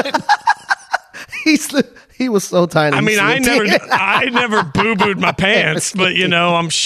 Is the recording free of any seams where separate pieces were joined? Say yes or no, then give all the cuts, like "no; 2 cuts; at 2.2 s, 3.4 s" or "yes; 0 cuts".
yes; 0 cuts